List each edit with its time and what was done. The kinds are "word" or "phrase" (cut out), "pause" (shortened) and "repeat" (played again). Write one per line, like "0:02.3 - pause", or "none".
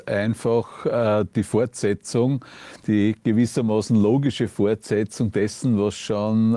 none